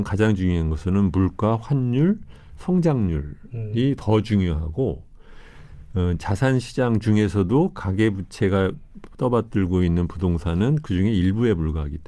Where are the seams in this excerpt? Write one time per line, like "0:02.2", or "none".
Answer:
none

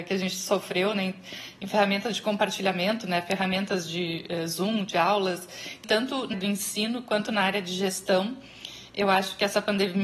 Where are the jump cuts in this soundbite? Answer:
0:05.8
0:06.3

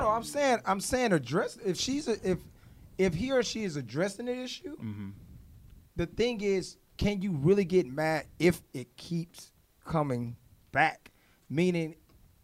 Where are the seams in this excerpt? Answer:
none

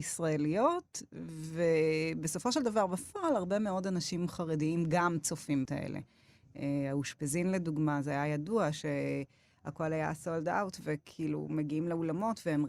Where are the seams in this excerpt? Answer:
0:05.6

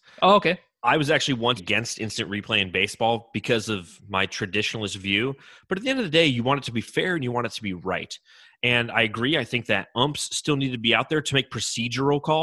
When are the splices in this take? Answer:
0:01.6

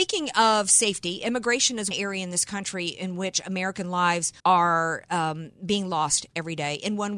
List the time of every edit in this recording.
0:01.9
0:04.4

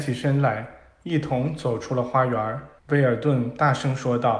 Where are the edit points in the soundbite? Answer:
0:02.8

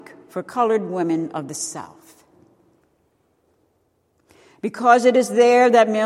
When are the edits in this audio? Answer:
none

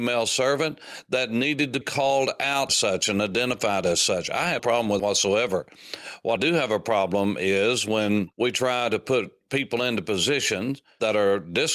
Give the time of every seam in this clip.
0:01.8
0:02.7
0:04.6
0:05.0
0:06.4

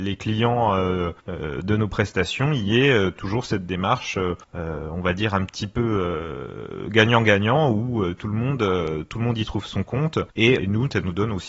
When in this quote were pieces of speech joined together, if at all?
0:10.6

